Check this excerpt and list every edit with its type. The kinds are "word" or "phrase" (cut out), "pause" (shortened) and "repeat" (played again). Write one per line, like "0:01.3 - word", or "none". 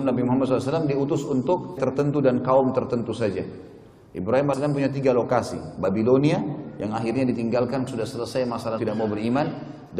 0:01.8 - word
0:04.5 - word
0:07.9 - word
0:08.8 - word